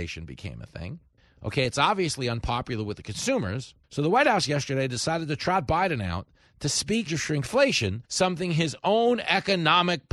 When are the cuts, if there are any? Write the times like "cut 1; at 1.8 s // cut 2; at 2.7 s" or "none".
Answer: cut 1; at 1.2 s // cut 2; at 3.8 s // cut 3; at 7.1 s // cut 4; at 8.0 s